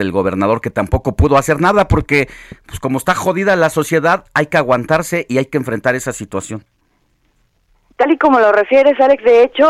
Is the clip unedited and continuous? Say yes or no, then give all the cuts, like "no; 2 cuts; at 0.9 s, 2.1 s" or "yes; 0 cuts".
yes; 0 cuts